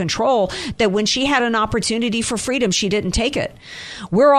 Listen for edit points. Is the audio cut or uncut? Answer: uncut